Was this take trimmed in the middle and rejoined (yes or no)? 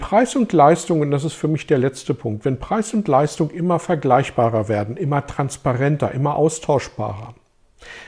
no